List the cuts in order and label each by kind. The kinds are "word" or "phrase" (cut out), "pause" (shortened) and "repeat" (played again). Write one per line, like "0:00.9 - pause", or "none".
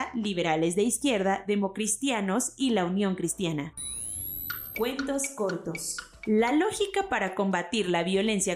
none